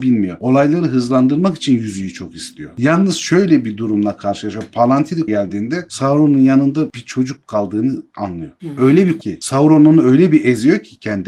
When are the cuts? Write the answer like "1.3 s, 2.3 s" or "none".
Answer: 5.3 s, 9.2 s